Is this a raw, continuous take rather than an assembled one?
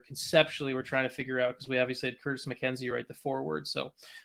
yes; 0 cuts

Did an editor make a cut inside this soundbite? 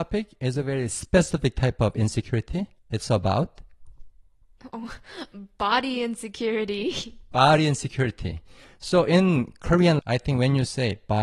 yes; 2 cuts; at 2.8 s, 10.0 s

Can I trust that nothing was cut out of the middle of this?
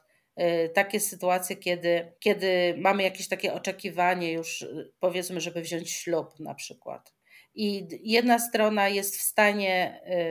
no; 1 cut; at 2.2 s

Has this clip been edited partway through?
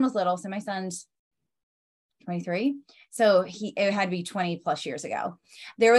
no; 0 cuts

